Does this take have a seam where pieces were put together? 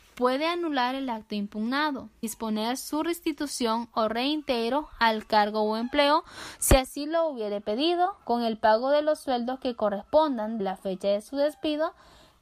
yes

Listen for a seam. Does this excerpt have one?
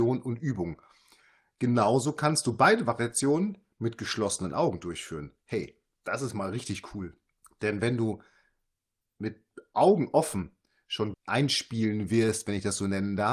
yes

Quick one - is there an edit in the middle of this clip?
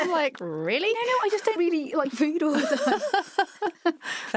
yes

